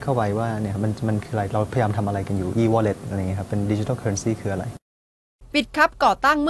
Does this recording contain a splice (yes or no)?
no